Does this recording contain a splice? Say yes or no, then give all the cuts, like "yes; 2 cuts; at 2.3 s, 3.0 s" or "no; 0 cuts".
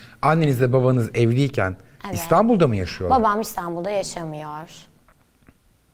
no; 0 cuts